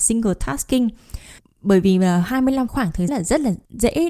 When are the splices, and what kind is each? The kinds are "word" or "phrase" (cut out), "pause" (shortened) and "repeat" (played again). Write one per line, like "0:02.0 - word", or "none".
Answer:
0:01.4 - pause
0:02.7 - phrase
0:03.1 - word

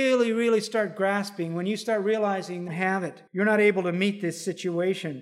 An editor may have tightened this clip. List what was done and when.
0:02.7 - phrase
0:03.3 - pause

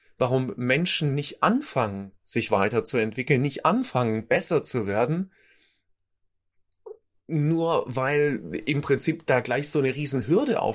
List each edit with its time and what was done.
none

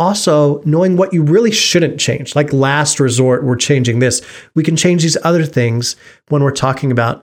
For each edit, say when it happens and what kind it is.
none

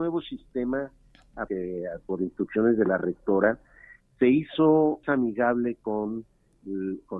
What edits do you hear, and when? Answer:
0:01.5 - phrase
0:05.0 - word

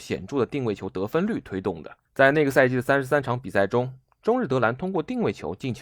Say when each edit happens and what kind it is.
0:02.1 - pause

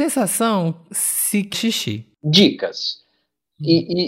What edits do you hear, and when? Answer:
0:01.5 - phrase

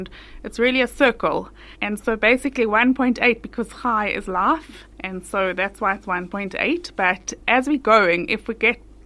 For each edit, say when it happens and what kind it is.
0:01.7 - pause
0:04.9 - pause

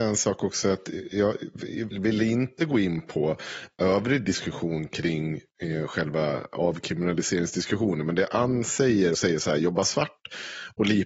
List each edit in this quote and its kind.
0:01.9 - word
0:09.1 - word

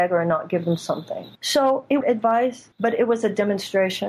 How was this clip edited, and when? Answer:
0:01.3 - pause
0:02.0 - phrase
0:02.7 - pause

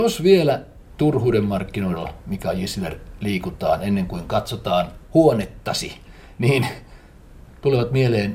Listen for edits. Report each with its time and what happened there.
none

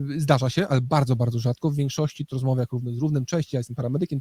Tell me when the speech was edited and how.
0:02.3 - word

